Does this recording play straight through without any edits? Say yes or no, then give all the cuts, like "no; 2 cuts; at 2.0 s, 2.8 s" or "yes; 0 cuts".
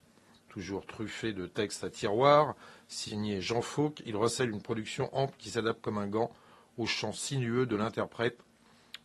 yes; 0 cuts